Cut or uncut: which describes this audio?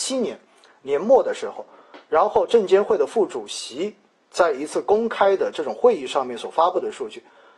uncut